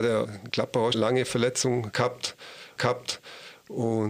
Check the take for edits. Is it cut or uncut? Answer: cut